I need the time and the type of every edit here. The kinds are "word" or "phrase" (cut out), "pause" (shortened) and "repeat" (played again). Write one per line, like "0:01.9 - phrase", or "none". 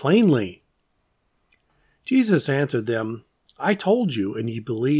none

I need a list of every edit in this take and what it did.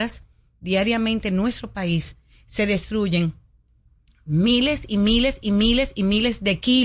0:05.4 - repeat

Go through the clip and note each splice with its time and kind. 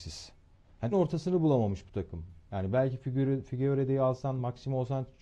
0:00.9 - word

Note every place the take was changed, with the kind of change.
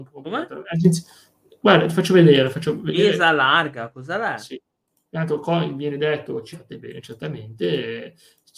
0:06.5 - phrase

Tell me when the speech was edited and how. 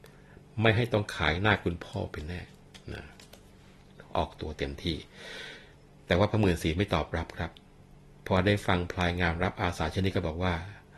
none

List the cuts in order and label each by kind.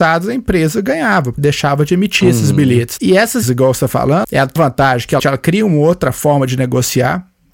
0:01.4 - word
0:03.0 - word
0:03.4 - word
0:04.2 - word
0:04.6 - word
0:05.2 - word

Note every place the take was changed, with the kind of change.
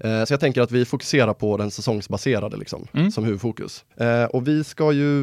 0:03.9 - pause

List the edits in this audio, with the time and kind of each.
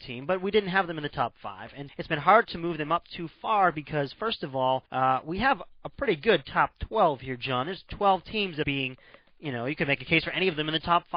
0:01.9 - word
0:04.9 - pause
0:08.6 - phrase

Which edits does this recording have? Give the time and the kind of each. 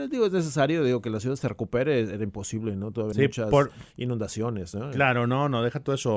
0:03.1 - word

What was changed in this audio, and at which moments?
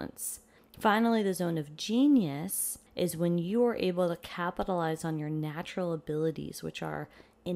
0:02.9 - pause

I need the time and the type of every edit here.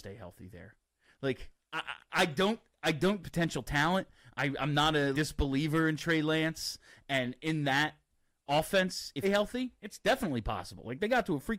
0:03.2 - phrase
0:05.1 - word
0:09.2 - phrase

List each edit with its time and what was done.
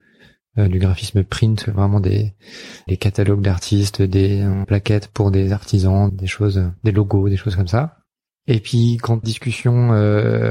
0:01.6 - word
0:02.9 - word
0:04.6 - word
0:06.1 - word
0:09.2 - word

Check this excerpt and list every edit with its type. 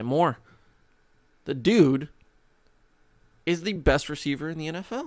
none

